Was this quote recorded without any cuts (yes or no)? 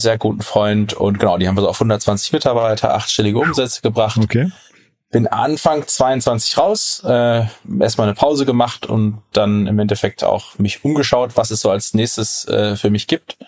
yes